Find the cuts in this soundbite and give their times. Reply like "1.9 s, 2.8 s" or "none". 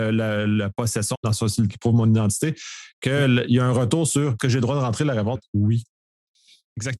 1.1 s, 1.7 s, 4.4 s, 5.3 s